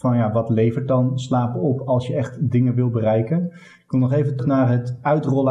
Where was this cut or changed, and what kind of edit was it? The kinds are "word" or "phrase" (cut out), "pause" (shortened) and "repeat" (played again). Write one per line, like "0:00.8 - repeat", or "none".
0:04.4 - word